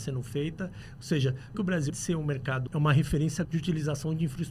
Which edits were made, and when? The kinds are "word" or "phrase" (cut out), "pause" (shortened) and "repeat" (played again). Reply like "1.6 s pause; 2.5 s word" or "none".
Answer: 1.5 s word; 1.9 s word; 2.7 s word; 3.4 s word

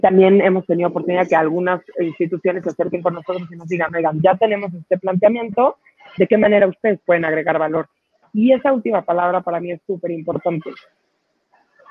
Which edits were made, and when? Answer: none

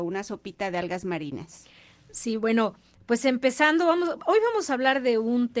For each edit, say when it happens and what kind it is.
none

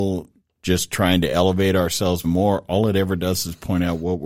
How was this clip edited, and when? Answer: 2.2 s phrase

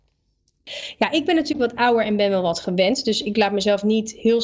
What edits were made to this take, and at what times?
none

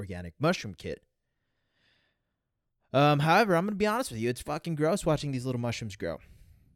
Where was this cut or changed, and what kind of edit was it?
none

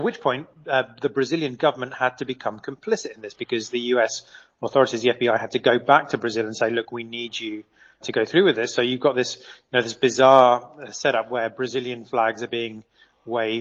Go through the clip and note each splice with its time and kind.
8.0 s word

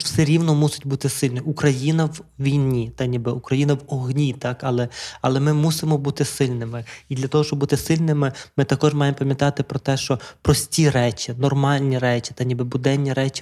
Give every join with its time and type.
none

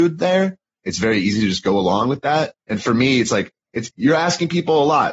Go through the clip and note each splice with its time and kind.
2.6 s pause

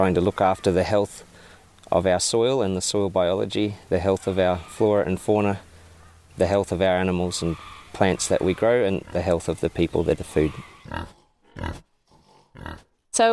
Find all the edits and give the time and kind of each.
10.1 s word

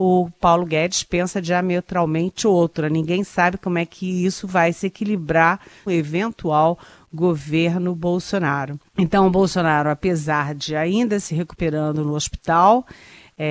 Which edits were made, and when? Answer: 5.9 s word; 8.9 s pause

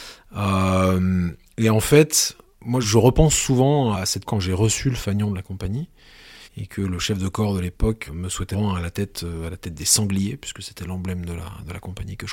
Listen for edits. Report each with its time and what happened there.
2.8 s phrase; 3.9 s word; 4.2 s phrase; 6.4 s pause; 8.1 s word; 8.5 s word

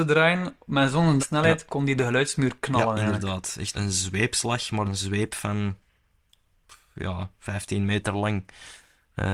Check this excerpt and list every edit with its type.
1.2 s word; 2.0 s word; 3.7 s word; 4.8 s word

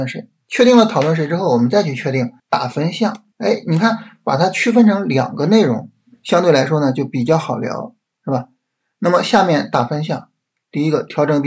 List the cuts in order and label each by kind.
2.4 s pause; 3.3 s pause

